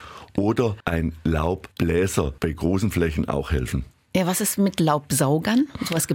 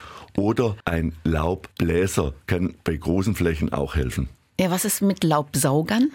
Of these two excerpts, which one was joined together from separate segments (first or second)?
first